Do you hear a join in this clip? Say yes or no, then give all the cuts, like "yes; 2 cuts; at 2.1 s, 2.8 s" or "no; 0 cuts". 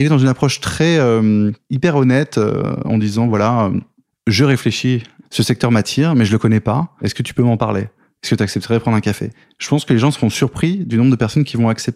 no; 0 cuts